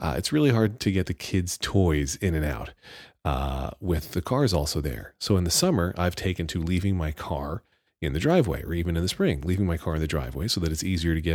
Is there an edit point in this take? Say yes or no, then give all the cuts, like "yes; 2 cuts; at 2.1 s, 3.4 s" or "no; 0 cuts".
no; 0 cuts